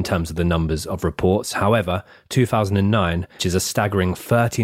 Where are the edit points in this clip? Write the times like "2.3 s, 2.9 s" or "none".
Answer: 3.4 s